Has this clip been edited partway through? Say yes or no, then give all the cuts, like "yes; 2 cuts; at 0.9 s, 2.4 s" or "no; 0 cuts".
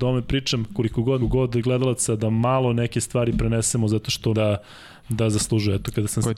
yes; 2 cuts; at 1.2 s, 4.3 s